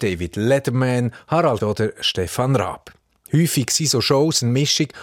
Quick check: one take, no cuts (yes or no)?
no